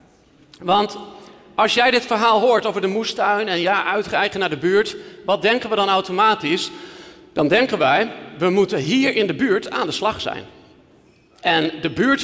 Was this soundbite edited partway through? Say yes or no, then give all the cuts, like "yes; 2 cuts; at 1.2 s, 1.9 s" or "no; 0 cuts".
no; 0 cuts